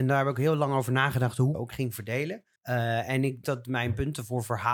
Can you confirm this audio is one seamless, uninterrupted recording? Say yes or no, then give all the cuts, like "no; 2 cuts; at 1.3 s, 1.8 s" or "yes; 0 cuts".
no; 3 cuts; at 1.5 s, 2.6 s, 3.4 s